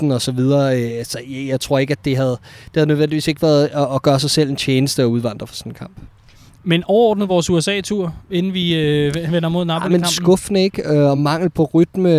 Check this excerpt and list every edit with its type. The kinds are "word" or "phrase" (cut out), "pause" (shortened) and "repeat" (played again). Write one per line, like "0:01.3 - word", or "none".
none

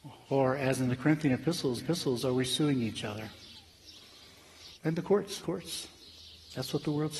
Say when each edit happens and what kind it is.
0:01.8 - repeat
0:04.7 - pause
0:05.4 - word

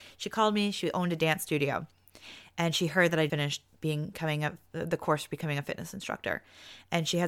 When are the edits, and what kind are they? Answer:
0:03.3 - word

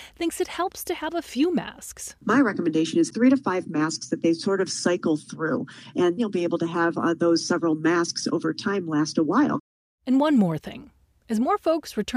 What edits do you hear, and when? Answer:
0:06.2 - word

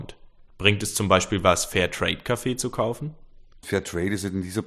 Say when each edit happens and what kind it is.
none

